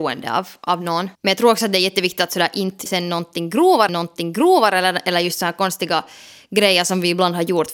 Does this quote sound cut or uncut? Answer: cut